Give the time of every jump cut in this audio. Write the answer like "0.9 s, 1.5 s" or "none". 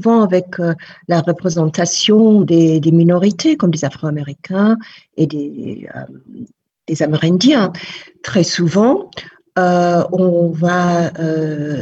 none